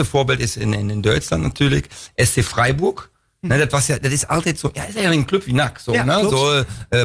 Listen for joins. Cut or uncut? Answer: uncut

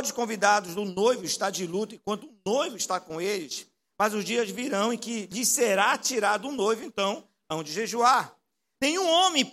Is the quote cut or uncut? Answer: uncut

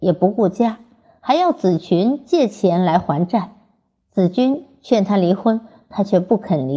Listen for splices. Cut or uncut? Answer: uncut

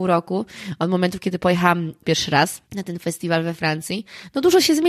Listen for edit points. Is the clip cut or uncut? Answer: cut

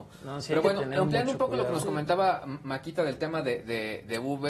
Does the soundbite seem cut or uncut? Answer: uncut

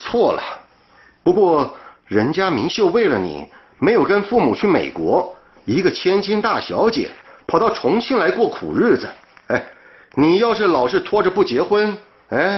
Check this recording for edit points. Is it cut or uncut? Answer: uncut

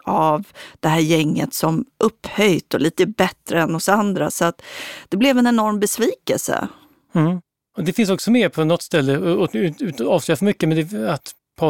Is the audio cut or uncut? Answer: uncut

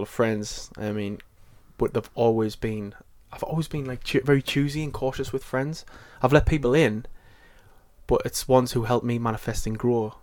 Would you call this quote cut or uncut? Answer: uncut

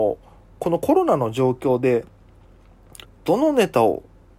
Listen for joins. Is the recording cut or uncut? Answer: cut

